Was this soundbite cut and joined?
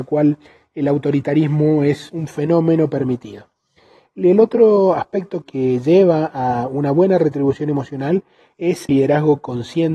yes; 3 cuts; at 2.1 s, 5.4 s, 8.9 s

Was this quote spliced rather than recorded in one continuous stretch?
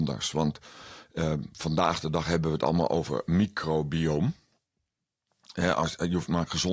no; 0 cuts

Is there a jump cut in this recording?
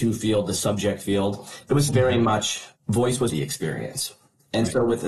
yes; 3 cuts; at 1.9 s, 2.8 s, 3.3 s

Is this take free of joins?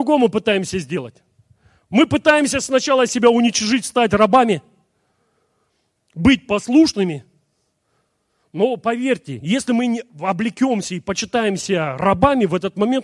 yes; 0 cuts

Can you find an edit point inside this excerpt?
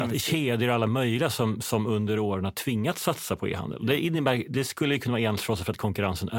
no; 0 cuts

